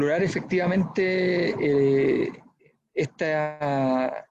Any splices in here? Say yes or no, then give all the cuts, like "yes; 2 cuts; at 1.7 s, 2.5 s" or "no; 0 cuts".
no; 0 cuts